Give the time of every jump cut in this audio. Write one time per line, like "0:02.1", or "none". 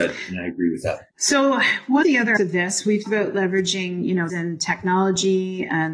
0:01.1
0:02.0
0:02.4
0:03.1
0:04.3